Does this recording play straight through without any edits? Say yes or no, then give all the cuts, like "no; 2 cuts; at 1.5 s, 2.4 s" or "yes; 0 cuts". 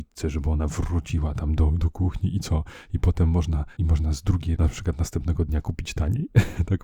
no; 2 cuts; at 3.8 s, 4.6 s